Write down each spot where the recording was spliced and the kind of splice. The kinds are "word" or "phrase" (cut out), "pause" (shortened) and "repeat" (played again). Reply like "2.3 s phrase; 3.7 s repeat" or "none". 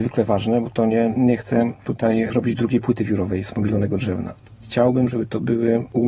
none